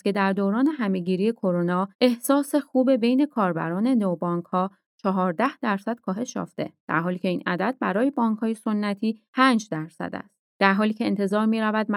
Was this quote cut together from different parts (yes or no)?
yes